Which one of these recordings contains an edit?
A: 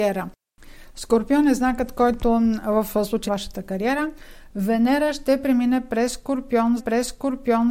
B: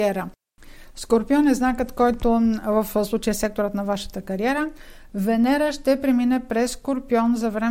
A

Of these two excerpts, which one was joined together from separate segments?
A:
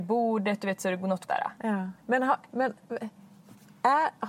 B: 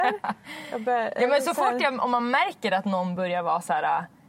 A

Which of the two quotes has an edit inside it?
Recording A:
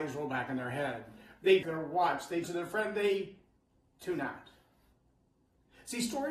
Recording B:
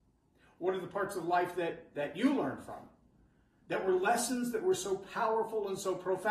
A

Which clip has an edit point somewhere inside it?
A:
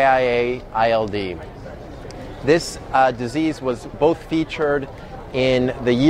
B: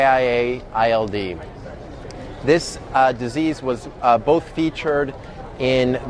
A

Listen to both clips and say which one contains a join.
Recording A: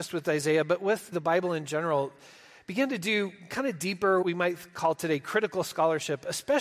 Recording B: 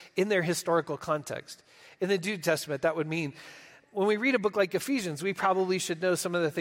A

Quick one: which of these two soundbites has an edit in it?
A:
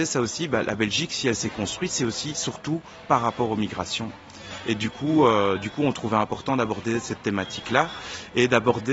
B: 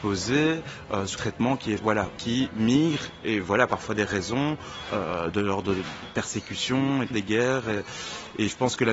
B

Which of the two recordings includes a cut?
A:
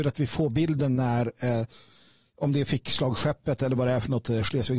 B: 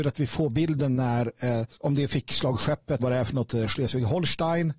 B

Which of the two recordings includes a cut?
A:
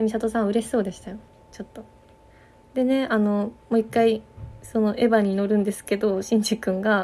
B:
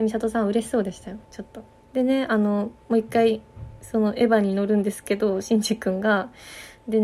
B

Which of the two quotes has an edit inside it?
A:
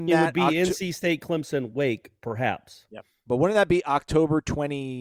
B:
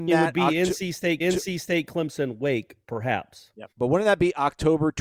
B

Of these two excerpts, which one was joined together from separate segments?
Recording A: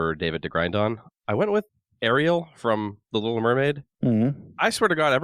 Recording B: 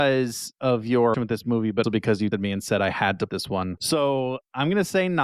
B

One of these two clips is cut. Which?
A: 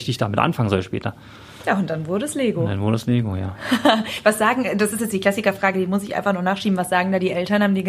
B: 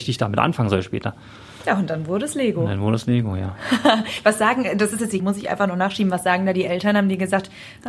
B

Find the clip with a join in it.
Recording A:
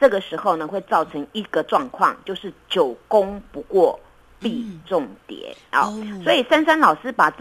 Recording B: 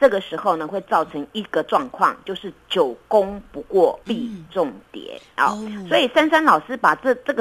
B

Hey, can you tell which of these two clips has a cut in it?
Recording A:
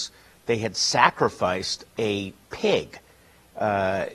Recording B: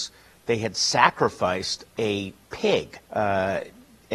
B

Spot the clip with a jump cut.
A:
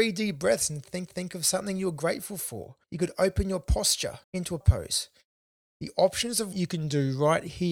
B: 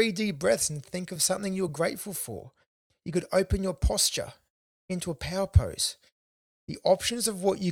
A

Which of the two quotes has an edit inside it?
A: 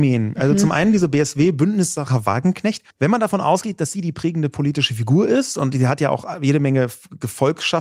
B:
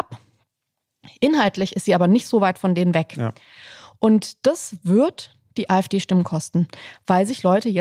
A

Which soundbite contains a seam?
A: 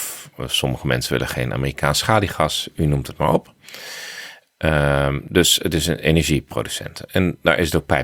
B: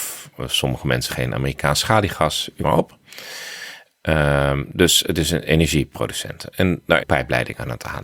B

